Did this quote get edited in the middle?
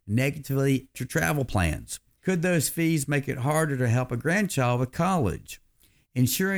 yes; 1 cut; at 0.9 s

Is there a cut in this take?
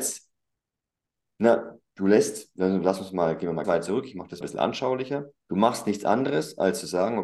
yes; 3 cuts; at 3.6 s, 4.4 s, 5.4 s

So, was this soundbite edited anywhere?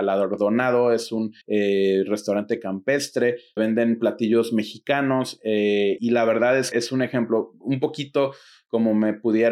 yes; 4 cuts; at 1.4 s, 3.6 s, 6.0 s, 6.7 s

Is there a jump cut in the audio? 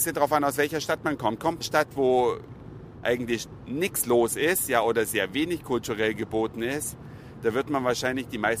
yes; 1 cut; at 1.6 s

